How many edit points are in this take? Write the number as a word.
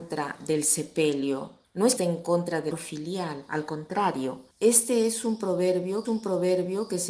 five